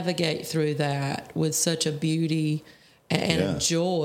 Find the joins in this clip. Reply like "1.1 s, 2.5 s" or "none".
none